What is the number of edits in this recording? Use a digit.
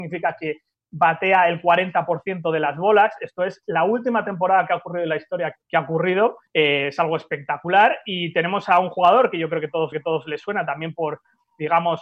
3